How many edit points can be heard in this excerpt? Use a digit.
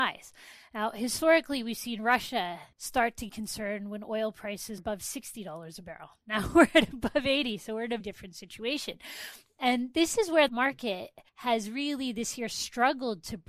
6